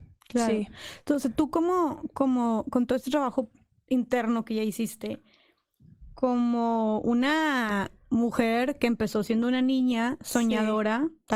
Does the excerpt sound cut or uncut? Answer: uncut